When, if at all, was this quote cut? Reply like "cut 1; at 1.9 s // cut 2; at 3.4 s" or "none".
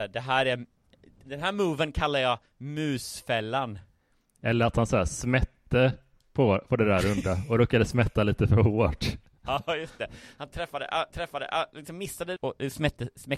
cut 1; at 11.1 s // cut 2; at 12.4 s